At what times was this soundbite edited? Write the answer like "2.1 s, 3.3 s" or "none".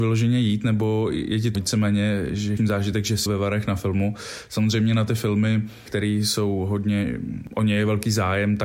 1.5 s, 2.6 s, 3.3 s